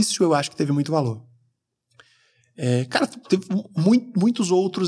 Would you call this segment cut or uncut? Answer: uncut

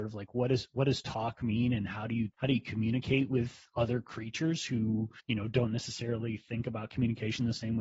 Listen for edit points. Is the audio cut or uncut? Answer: cut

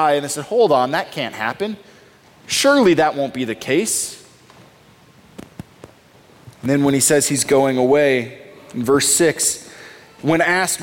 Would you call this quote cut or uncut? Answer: uncut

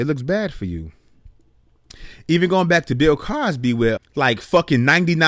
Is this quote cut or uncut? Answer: cut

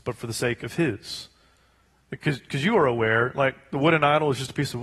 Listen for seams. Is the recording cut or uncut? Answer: uncut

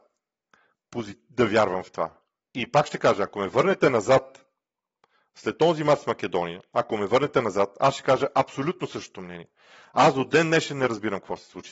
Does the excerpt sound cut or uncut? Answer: uncut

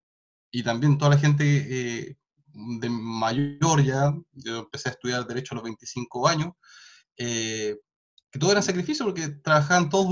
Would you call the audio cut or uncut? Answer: uncut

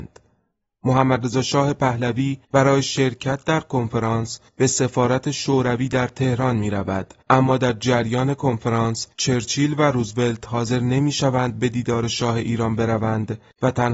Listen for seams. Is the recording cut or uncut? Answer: cut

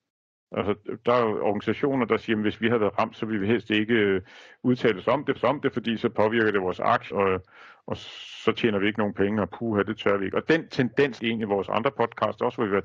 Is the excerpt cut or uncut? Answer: cut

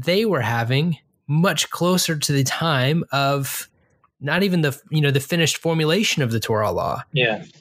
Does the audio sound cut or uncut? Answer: uncut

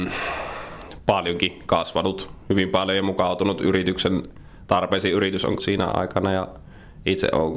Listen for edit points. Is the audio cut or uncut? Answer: cut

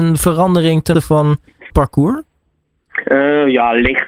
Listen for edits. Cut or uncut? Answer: cut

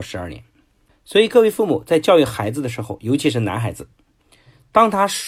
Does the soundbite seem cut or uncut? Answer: uncut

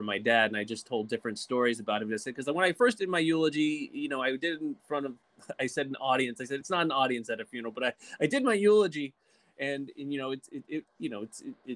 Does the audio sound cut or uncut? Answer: uncut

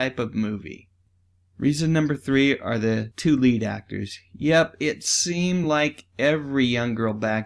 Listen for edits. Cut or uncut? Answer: uncut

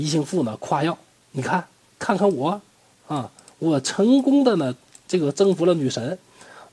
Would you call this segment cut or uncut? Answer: uncut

